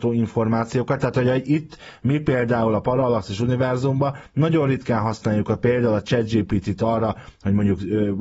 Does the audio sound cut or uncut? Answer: uncut